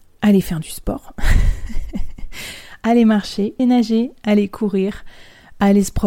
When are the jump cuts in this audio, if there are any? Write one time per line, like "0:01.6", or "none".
0:03.6

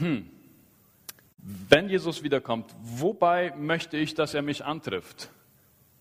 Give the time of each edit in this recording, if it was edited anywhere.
0:01.2

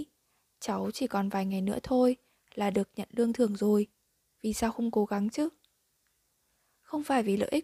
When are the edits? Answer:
none

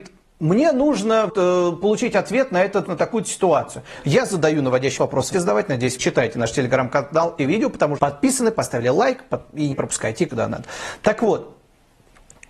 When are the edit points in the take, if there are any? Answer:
0:01.3
0:02.9
0:05.0
0:05.3
0:06.0
0:07.4
0:08.0
0:09.7
0:10.3

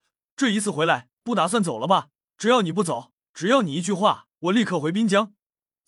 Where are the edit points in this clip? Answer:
0:01.1
0:02.2
0:03.2
0:04.3

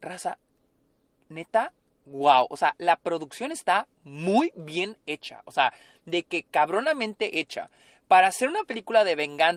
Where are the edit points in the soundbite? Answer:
none

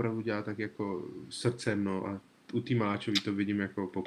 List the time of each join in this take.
none

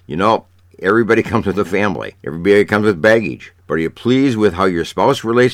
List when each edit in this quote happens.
0:02.2

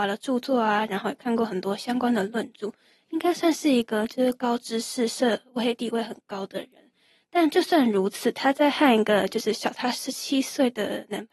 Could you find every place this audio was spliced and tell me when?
none

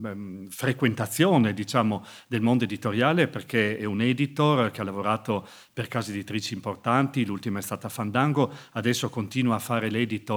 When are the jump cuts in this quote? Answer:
none

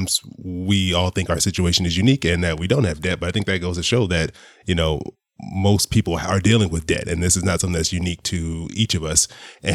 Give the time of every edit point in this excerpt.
none

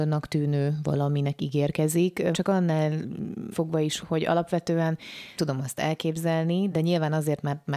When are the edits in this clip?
0:02.3
0:03.5
0:04.0
0:05.4
0:06.7

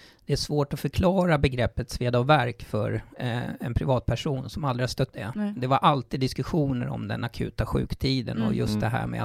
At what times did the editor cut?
0:05.1

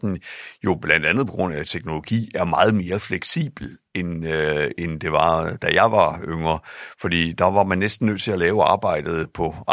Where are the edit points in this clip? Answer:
none

